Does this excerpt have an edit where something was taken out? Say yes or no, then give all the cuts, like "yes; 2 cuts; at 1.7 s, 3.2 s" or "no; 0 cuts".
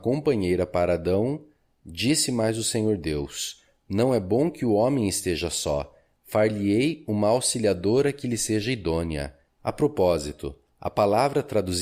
no; 0 cuts